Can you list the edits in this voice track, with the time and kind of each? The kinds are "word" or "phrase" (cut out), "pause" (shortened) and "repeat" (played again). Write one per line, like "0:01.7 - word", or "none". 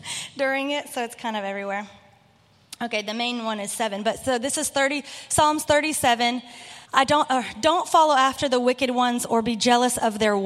0:06.8 - pause